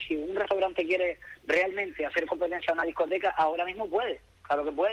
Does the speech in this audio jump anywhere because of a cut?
no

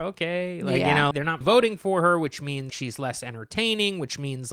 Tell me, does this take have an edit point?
yes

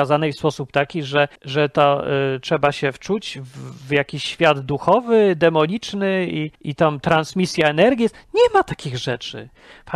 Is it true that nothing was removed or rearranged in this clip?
no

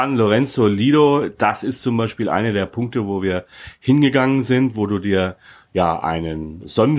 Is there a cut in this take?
no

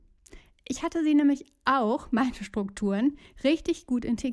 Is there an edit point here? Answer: no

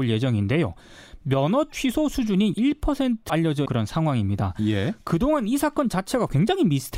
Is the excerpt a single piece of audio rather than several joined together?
no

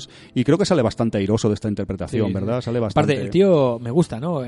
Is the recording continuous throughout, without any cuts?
yes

